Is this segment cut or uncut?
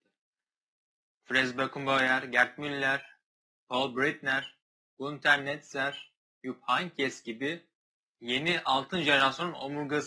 uncut